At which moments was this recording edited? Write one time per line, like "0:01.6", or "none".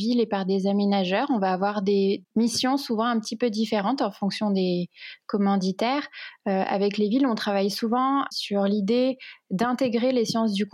none